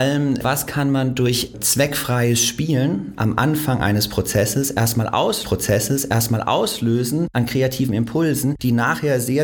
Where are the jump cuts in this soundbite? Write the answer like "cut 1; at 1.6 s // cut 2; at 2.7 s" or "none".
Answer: cut 1; at 5.4 s